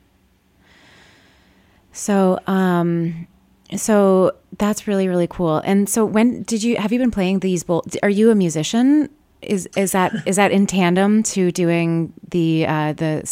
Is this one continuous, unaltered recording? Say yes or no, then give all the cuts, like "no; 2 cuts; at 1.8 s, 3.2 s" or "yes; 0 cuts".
yes; 0 cuts